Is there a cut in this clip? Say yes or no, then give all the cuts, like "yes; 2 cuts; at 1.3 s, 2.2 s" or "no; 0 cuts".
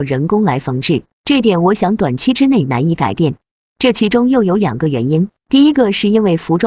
yes; 2 cuts; at 1.1 s, 5.4 s